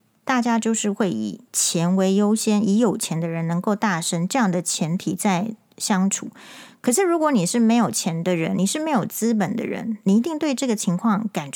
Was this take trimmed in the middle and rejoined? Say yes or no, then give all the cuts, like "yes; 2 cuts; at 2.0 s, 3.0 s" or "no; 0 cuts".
no; 0 cuts